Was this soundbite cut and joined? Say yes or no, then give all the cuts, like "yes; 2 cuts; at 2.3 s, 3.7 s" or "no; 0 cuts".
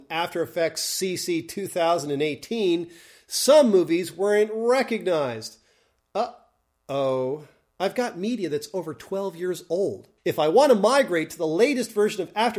yes; 1 cut; at 10.2 s